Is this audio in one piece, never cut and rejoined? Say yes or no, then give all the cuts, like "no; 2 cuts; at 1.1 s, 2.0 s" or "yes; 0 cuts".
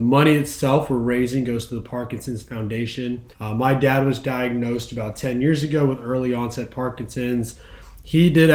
no; 1 cut; at 3.3 s